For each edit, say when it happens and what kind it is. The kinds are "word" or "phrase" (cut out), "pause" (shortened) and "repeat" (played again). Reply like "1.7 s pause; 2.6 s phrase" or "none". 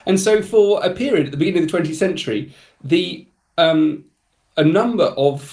none